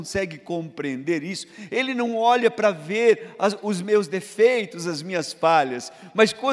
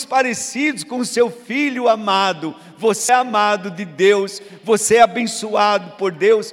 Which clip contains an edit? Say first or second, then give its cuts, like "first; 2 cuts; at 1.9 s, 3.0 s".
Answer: second; 1 cut; at 3.1 s